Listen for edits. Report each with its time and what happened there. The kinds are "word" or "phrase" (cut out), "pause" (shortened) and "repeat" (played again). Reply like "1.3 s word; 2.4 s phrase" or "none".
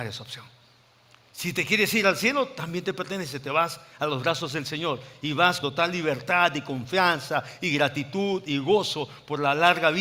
5.6 s word